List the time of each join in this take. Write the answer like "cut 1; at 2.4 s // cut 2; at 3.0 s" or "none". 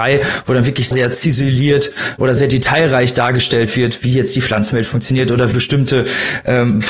cut 1; at 0.9 s // cut 2; at 2.4 s // cut 3; at 5.5 s